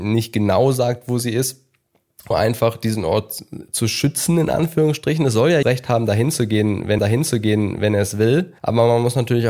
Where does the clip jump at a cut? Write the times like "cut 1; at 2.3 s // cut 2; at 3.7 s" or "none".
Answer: cut 1; at 2.3 s // cut 2; at 5.6 s // cut 3; at 7.0 s // cut 4; at 8.6 s